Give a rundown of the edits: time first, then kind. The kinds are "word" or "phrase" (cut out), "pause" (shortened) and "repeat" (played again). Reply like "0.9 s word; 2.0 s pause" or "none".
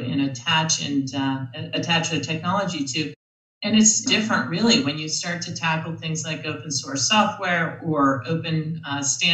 4.1 s phrase